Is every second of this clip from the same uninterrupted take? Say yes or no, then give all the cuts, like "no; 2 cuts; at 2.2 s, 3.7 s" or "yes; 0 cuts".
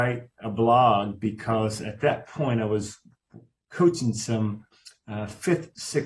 yes; 0 cuts